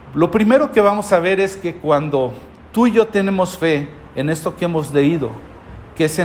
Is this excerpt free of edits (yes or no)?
yes